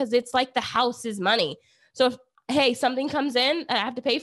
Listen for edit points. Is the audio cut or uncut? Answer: uncut